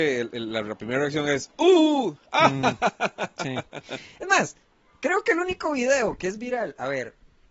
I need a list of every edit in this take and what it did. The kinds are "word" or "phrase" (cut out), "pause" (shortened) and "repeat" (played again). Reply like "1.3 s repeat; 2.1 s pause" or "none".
none